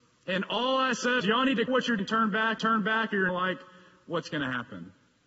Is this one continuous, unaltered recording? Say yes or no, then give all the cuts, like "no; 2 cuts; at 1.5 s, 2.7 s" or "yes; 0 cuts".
no; 5 cuts; at 1.2 s, 1.7 s, 2.0 s, 2.6 s, 3.3 s